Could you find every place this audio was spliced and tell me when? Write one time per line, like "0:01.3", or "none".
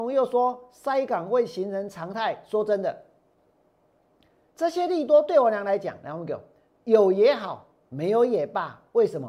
none